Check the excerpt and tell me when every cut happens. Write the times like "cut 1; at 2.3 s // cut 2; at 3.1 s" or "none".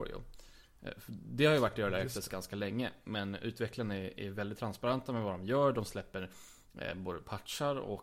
none